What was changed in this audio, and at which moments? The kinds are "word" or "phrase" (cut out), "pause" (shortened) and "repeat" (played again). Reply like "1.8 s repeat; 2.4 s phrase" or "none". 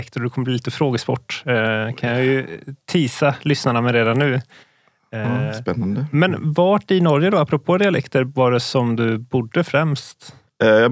none

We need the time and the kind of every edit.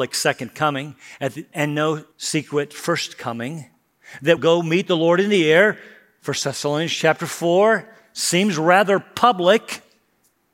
1.5 s word; 2.1 s pause; 4.4 s phrase

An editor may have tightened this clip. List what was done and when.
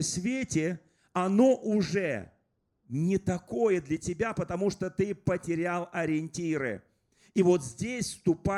none

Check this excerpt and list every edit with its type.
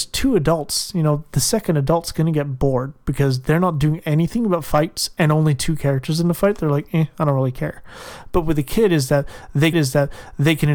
9.7 s repeat

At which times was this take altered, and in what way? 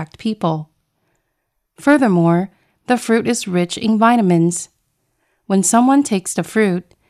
none

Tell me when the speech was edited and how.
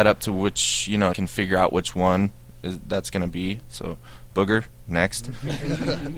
1.1 s phrase; 4.3 s word

